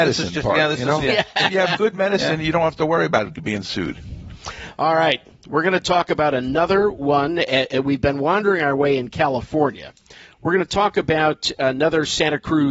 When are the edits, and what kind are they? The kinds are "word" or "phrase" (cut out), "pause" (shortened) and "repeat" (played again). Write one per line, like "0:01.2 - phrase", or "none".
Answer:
none